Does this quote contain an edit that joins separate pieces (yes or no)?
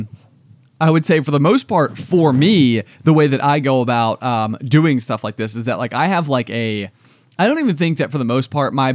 no